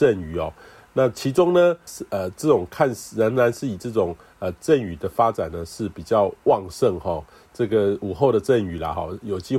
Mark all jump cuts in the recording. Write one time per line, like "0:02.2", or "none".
0:01.9